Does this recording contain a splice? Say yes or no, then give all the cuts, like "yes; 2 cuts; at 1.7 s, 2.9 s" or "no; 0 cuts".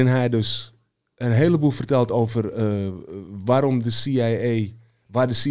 no; 0 cuts